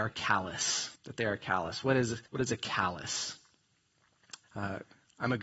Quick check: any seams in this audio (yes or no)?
yes